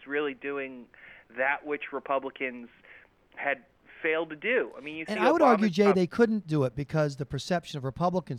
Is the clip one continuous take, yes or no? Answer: yes